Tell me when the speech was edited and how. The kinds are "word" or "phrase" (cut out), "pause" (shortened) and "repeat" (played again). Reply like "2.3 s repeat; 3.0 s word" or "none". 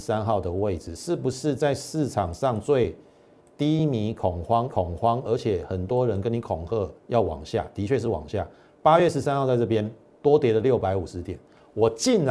4.7 s repeat; 7.0 s pause